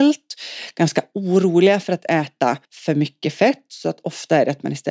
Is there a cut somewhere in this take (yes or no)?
yes